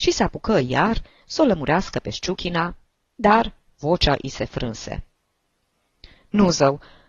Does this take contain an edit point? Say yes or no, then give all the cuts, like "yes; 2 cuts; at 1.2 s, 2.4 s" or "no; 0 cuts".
no; 0 cuts